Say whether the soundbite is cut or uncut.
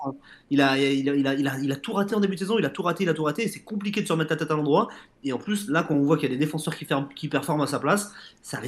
uncut